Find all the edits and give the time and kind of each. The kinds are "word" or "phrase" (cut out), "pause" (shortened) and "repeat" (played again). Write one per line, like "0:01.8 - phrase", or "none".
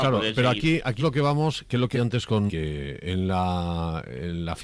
0:01.0 - word
0:01.9 - word
0:02.5 - word